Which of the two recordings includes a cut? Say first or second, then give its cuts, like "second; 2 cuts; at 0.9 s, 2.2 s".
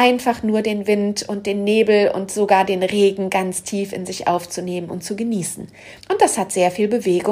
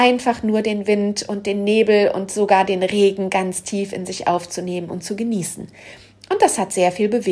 first; 1 cut; at 6.0 s